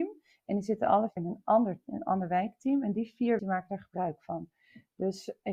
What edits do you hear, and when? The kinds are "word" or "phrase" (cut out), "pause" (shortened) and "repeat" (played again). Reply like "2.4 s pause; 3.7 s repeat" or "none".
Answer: 1.2 s word; 1.8 s word; 3.4 s word